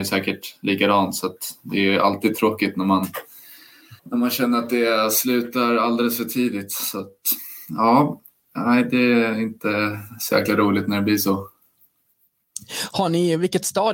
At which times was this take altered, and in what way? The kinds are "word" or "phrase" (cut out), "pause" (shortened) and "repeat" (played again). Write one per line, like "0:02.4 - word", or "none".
0:04.0 - pause